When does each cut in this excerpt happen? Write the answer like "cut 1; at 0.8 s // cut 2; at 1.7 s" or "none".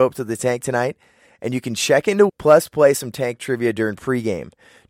cut 1; at 2.3 s